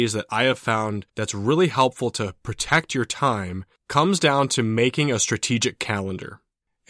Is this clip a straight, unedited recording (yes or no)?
no